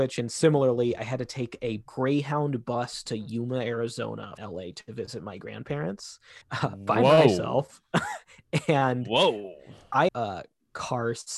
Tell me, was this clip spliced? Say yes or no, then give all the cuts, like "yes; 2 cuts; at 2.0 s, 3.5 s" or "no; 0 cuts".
yes; 4 cuts; at 1.9 s, 4.4 s, 6.4 s, 10.1 s